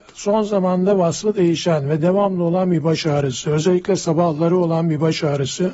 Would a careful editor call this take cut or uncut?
uncut